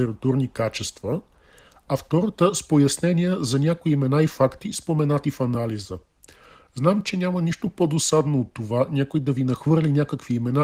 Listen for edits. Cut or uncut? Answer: uncut